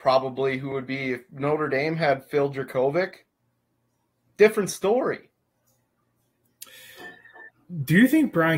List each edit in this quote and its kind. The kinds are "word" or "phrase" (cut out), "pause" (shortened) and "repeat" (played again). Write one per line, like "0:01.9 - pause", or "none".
none